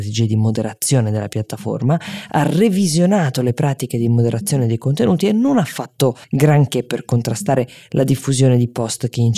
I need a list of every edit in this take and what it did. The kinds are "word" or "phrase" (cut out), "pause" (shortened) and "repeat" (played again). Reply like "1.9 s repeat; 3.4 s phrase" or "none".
6.2 s pause